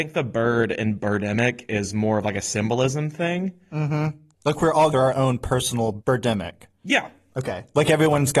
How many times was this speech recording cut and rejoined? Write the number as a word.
one